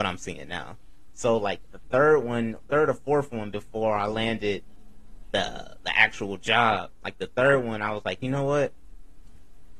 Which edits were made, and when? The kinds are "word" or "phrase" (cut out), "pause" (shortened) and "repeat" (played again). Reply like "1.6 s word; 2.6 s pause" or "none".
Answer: none